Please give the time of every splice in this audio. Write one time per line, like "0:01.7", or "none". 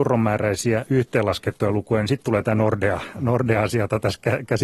none